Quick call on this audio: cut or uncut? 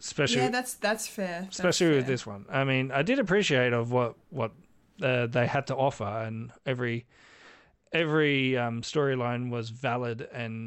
uncut